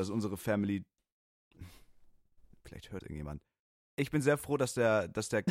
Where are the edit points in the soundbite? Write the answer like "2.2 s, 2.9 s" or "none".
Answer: 3.0 s